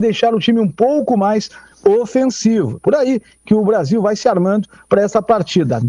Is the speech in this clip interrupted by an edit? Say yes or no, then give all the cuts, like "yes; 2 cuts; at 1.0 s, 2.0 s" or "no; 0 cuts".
no; 0 cuts